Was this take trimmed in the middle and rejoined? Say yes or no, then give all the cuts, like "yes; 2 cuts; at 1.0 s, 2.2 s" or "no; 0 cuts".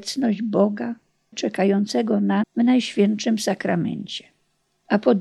yes; 2 cuts; at 1.3 s, 2.4 s